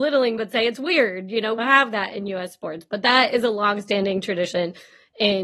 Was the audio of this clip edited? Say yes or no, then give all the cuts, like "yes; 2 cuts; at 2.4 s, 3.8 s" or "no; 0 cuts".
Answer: yes; 1 cut; at 1.6 s